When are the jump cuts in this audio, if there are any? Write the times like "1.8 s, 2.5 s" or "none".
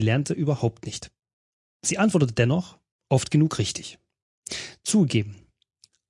none